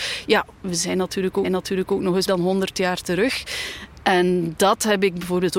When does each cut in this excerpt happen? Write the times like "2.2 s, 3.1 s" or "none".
1.4 s, 2.3 s